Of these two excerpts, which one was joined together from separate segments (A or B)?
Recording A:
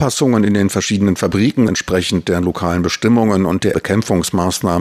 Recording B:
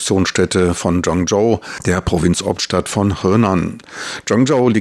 A